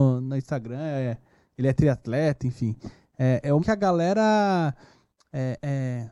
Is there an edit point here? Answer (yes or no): yes